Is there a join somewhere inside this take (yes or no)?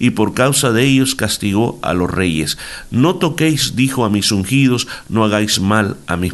no